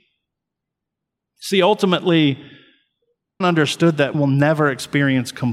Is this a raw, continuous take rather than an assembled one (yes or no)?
no